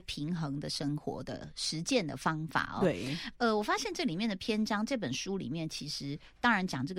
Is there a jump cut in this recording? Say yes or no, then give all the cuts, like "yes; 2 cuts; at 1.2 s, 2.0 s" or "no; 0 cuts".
no; 0 cuts